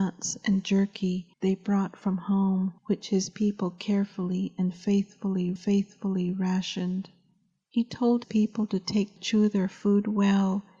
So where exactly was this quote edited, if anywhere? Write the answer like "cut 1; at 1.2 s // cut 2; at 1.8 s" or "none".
cut 1; at 1.3 s // cut 2; at 2.8 s // cut 3; at 5.6 s // cut 4; at 8.2 s // cut 5; at 9.2 s